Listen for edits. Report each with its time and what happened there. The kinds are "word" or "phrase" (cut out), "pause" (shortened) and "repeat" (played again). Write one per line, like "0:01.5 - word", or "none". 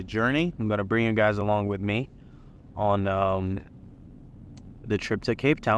none